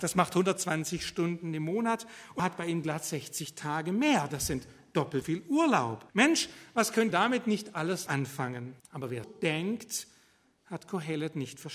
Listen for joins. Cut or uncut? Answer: cut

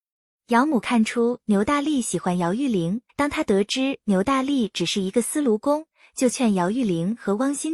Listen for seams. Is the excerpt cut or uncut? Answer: cut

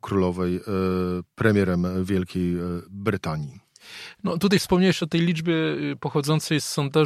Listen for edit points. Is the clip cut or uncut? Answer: uncut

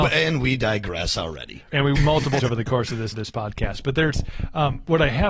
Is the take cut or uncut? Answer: cut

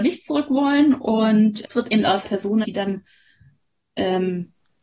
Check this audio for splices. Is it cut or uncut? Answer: cut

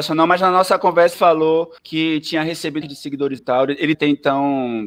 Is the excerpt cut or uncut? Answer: cut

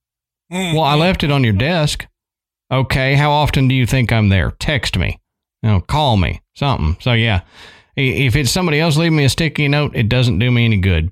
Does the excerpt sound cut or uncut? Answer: uncut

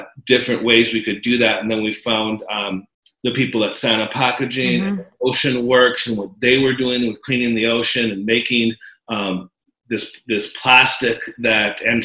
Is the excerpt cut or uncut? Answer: uncut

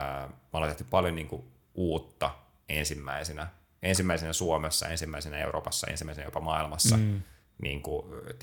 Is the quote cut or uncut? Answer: uncut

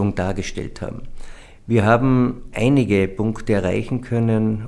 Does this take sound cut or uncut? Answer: uncut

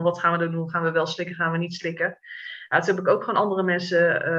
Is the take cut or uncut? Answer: uncut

